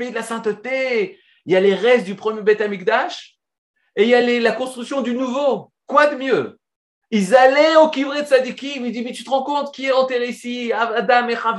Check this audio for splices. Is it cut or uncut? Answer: uncut